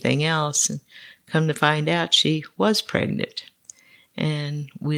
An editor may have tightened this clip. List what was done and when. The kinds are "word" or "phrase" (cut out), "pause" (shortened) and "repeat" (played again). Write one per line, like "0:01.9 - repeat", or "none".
none